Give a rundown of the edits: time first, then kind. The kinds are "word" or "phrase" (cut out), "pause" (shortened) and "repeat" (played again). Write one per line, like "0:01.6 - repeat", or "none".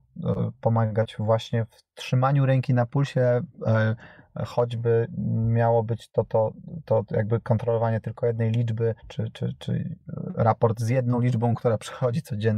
0:09.0 - pause